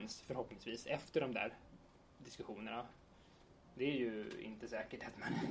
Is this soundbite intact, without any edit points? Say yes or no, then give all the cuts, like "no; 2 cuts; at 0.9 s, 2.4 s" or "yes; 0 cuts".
yes; 0 cuts